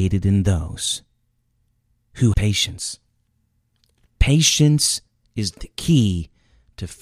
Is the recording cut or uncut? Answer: cut